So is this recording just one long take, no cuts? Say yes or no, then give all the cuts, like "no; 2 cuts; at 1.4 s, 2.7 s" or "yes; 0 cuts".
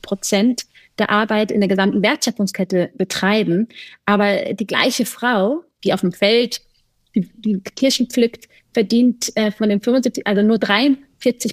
yes; 0 cuts